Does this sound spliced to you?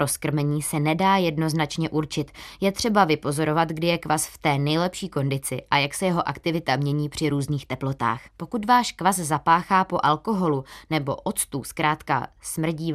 yes; 1 cut; at 8.3 s

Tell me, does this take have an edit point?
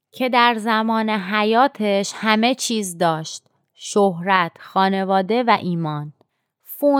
no; 0 cuts

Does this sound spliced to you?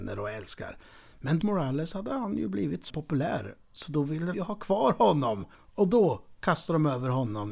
yes; 4 cuts; at 1.4 s, 2.9 s, 4.3 s, 5.5 s

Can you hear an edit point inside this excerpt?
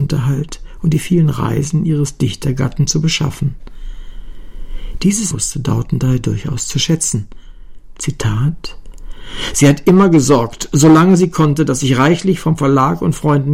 yes; 1 cut; at 5.3 s

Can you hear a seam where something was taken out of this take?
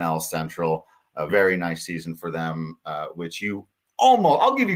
yes; 1 cut; at 1.3 s

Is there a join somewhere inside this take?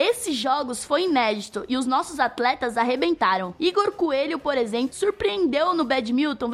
no; 0 cuts

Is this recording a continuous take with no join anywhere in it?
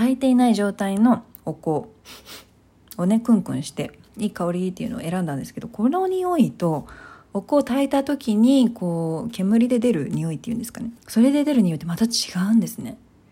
no; 1 cut; at 11.0 s

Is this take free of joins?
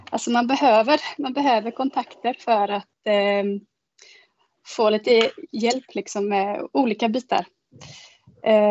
yes; 0 cuts

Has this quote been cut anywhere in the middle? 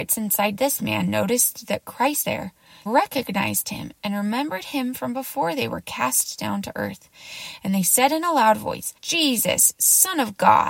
yes; 3 cuts; at 2.2 s, 2.9 s, 9.0 s

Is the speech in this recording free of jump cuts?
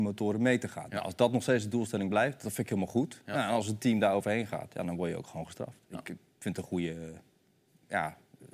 yes; 0 cuts

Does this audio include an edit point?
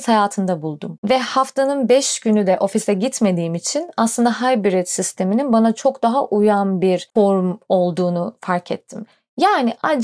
no; 0 cuts

